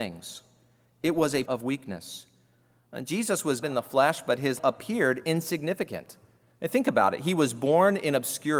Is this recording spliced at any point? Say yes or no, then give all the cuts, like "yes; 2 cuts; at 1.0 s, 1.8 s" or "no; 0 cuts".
yes; 3 cuts; at 1.5 s, 3.6 s, 4.6 s